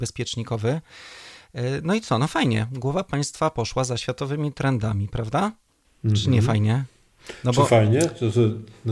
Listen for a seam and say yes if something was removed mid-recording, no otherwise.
no